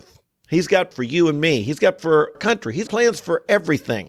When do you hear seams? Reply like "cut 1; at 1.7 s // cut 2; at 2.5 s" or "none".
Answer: cut 1; at 0.9 s // cut 2; at 2.0 s // cut 3; at 2.3 s // cut 4; at 2.9 s